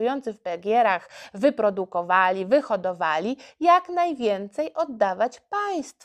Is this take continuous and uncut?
yes; 0 cuts

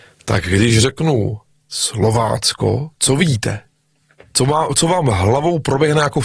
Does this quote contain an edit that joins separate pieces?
no; 0 cuts

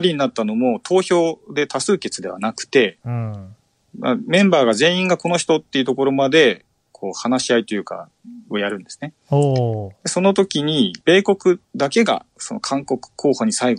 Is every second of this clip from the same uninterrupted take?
no; 3 cuts; at 3.8 s, 11.0 s, 11.7 s

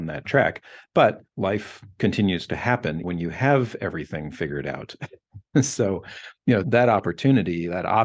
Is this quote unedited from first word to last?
no; 3 cuts; at 1.3 s, 3.0 s, 6.6 s

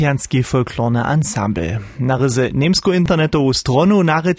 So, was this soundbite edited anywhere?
no; 0 cuts

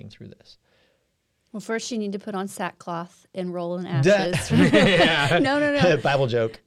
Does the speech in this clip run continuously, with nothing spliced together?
yes; 0 cuts

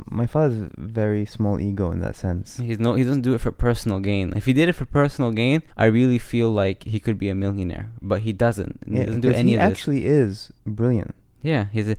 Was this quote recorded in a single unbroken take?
no; 2 cuts; at 5.7 s, 10.6 s

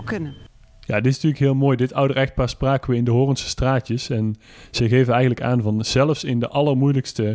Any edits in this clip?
no; 0 cuts

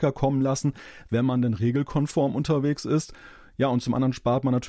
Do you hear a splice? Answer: no; 0 cuts

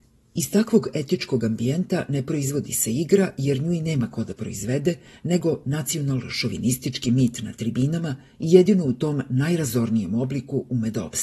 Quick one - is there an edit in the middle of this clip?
no; 0 cuts

